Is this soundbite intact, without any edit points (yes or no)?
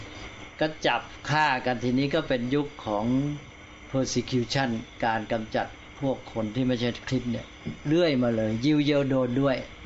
yes